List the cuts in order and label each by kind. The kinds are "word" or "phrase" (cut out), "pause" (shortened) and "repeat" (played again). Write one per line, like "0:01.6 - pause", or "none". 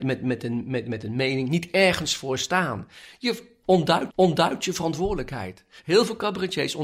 0:04.1 - repeat